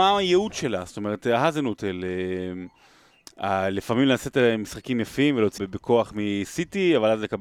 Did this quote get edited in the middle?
yes; 1 cut; at 5.6 s

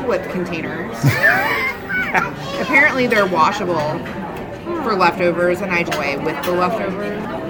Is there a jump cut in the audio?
yes; 1 cut; at 5.9 s

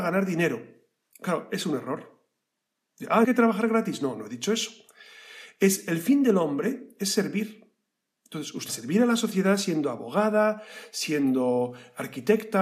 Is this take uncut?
no; 2 cuts; at 3.2 s, 8.7 s

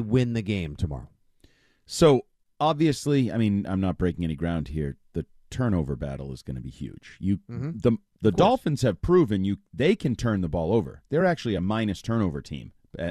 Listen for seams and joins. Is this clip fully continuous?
yes; 0 cuts

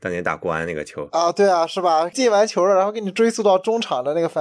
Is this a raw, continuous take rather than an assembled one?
yes; 0 cuts

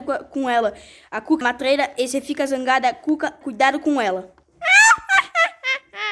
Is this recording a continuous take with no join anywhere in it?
no; 2 cuts; at 1.4 s, 3.4 s

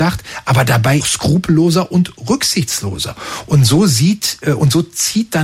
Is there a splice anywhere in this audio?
yes; 1 cut; at 1.0 s

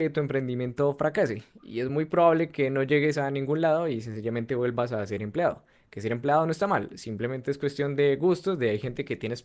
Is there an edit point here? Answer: no; 0 cuts

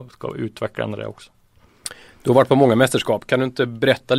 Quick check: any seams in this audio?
no; 0 cuts

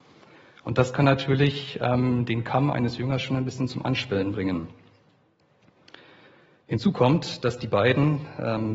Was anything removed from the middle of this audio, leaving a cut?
no; 0 cuts

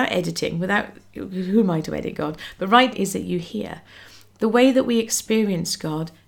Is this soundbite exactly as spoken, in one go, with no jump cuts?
no; 1 cut; at 2.9 s

